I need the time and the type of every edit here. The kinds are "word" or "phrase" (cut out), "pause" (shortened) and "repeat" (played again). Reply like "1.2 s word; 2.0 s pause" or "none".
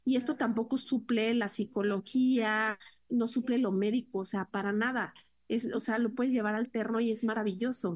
none